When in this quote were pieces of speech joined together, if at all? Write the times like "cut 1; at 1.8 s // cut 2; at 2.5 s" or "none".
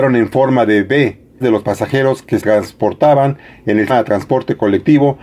cut 1; at 1.4 s // cut 2; at 2.4 s // cut 3; at 3.9 s